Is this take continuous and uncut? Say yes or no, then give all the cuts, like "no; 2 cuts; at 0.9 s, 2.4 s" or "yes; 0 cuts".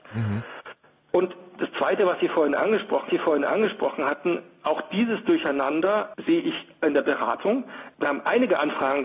no; 1 cut; at 3.1 s